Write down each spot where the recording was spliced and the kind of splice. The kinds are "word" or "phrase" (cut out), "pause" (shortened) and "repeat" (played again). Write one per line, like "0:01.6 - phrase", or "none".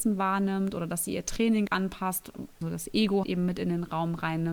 0:01.7 - word
0:02.6 - word
0:03.2 - word